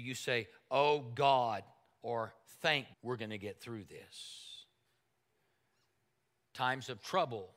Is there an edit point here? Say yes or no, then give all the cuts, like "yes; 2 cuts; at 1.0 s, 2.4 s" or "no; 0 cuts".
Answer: yes; 1 cut; at 2.9 s